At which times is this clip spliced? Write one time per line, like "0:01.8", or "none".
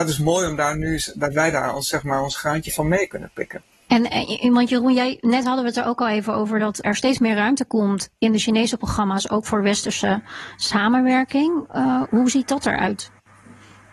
0:06.8
0:12.0